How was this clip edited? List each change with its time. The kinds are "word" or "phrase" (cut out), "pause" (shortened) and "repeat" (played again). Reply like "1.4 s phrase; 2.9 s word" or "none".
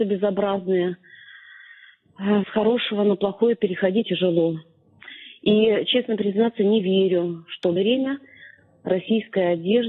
2.4 s word; 4.0 s word; 7.8 s word

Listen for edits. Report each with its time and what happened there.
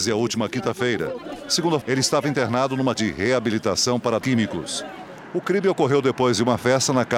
1.8 s word; 2.9 s word; 4.2 s word

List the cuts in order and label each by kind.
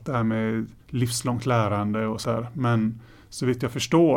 2.2 s word

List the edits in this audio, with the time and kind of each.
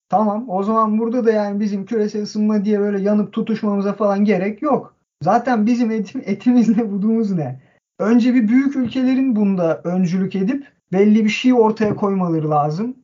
none

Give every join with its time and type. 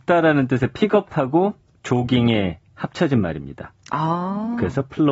2.7 s pause

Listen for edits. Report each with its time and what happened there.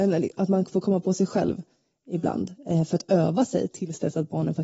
none

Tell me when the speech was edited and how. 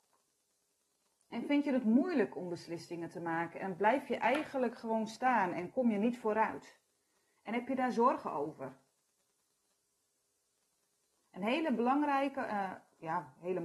none

